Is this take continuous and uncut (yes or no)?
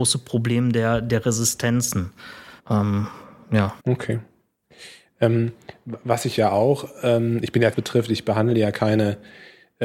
no